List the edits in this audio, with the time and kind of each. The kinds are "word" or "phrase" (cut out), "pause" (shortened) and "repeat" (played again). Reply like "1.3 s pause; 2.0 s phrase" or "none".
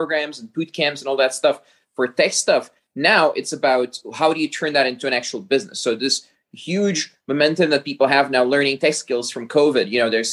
none